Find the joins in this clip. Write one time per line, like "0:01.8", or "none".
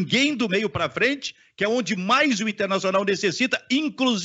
none